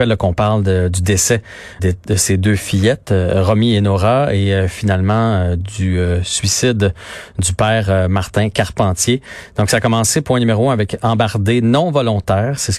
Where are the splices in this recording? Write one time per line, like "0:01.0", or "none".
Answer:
0:01.8